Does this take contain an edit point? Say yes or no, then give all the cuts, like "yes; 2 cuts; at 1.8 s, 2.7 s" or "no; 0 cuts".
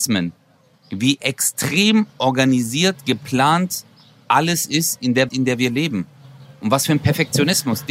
yes; 1 cut; at 5.3 s